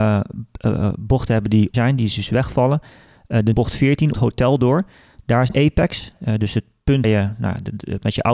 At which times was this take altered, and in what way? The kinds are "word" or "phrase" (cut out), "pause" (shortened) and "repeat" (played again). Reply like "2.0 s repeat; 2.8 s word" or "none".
1.7 s word; 3.5 s word; 4.1 s word; 5.5 s word; 7.0 s word